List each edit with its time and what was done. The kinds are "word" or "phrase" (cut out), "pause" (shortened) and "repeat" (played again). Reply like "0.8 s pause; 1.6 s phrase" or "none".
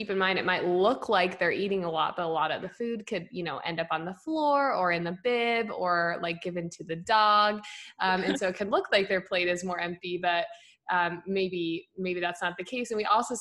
none